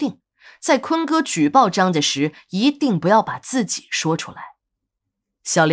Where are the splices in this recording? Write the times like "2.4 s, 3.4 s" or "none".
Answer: none